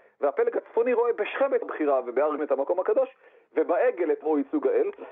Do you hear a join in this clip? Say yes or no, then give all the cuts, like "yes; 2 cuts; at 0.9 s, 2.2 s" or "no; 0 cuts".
yes; 3 cuts; at 1.6 s, 2.4 s, 4.2 s